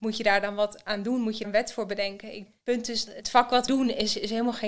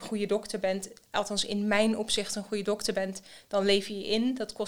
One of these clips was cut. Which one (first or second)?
first